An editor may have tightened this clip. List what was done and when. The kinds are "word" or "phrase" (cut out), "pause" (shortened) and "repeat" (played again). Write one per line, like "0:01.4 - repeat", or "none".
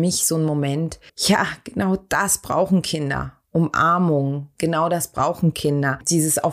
0:01.1 - pause